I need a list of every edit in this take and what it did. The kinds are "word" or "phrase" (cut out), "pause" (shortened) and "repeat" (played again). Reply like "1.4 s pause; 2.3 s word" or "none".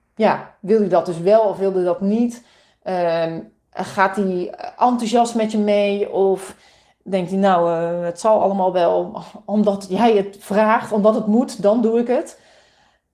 none